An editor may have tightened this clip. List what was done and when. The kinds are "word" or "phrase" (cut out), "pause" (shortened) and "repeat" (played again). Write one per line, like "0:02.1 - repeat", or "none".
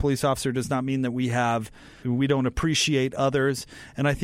0:02.0 - word